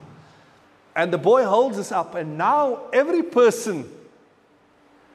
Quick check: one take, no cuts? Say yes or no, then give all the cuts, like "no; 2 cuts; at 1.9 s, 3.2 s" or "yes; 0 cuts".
yes; 0 cuts